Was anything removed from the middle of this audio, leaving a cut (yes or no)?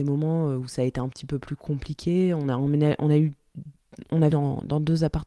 yes